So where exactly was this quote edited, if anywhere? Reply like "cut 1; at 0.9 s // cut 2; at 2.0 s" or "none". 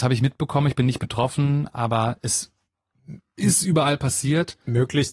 none